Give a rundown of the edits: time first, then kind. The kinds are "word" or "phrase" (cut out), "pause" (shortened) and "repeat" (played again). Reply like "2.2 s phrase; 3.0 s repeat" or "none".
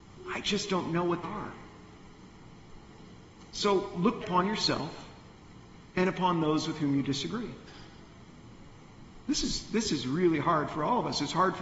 1.2 s word; 4.2 s phrase